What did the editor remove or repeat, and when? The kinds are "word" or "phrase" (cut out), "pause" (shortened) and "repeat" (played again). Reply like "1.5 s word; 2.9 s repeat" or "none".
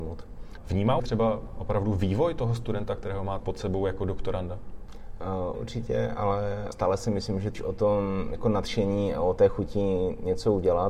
1.0 s phrase; 3.4 s word; 5.5 s word; 6.7 s word; 7.5 s phrase